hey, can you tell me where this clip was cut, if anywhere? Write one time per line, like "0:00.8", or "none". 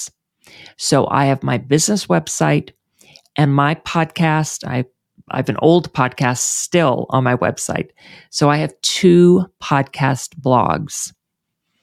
none

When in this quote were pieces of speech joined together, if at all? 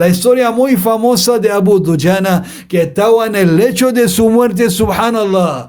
none

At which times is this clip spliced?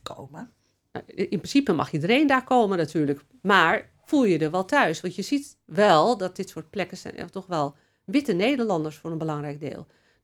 none

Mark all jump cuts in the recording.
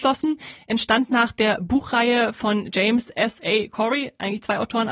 none

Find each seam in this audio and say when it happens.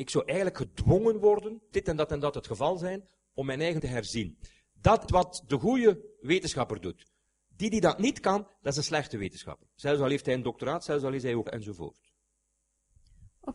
0:01.7
0:03.8
0:05.1
0:11.5

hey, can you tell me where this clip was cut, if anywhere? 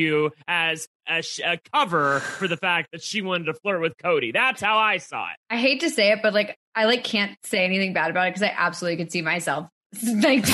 0:05.4
0:06.6

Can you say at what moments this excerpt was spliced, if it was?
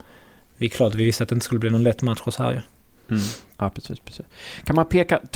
none

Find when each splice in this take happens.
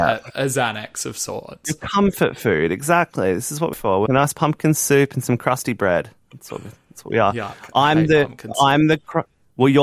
0:03.7
0:04.1

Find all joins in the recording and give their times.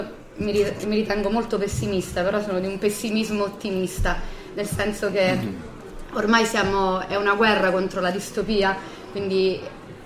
none

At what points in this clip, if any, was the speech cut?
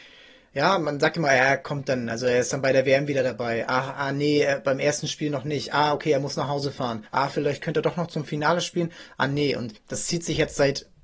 0:07.1
0:09.8

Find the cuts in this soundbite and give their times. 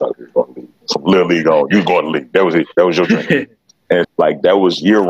0:04.0

